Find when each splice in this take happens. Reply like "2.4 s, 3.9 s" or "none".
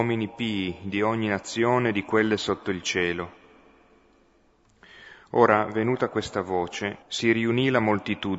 7.0 s